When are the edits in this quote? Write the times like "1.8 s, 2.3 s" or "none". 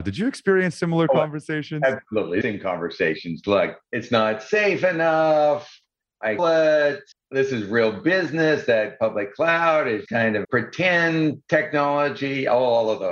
2.4 s, 3.8 s, 6.4 s, 7.1 s, 10.1 s, 10.4 s, 11.4 s

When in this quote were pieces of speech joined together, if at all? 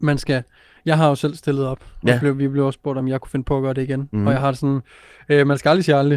none

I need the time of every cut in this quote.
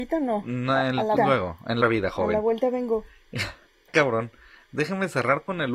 1.2 s, 1.8 s, 3.9 s

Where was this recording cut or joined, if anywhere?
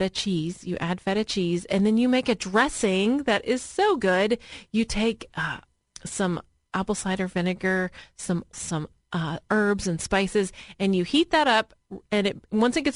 8.5 s

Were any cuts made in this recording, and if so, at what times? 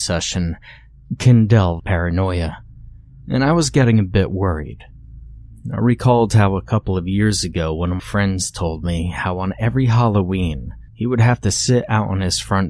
1.8 s, 8.0 s, 10.9 s

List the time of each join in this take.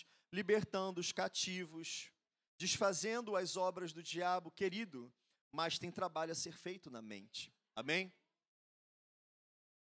none

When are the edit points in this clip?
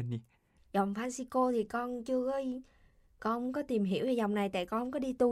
none

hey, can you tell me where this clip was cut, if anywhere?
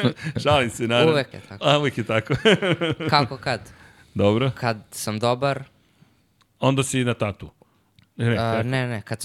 1.3 s

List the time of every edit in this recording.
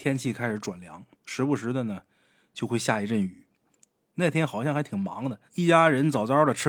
1.1 s, 5.5 s

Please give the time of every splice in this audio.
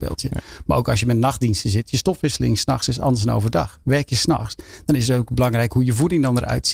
none

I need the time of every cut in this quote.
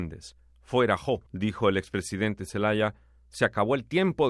1.3 s

